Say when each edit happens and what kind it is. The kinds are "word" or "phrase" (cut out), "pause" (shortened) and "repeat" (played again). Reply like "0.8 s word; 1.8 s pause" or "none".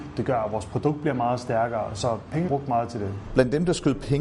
2.5 s word